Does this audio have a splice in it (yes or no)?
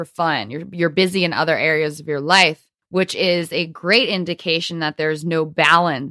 no